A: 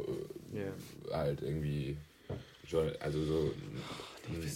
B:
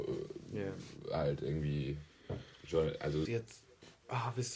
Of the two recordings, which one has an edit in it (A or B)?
B